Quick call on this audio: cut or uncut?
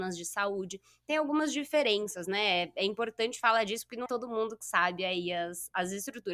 cut